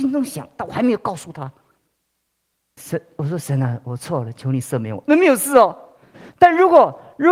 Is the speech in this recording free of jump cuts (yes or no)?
yes